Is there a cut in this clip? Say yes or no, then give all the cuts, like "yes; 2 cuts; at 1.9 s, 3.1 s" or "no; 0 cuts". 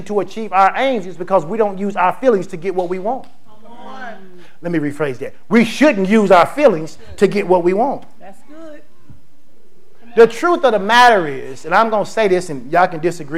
no; 0 cuts